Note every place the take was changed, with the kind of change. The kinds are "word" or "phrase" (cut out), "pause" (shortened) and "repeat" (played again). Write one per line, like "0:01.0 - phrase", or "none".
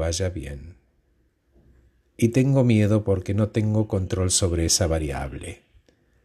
none